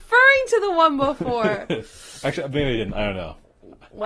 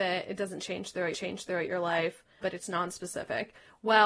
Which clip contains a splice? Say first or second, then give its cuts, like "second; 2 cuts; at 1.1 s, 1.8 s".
second; 2 cuts; at 1.1 s, 2.4 s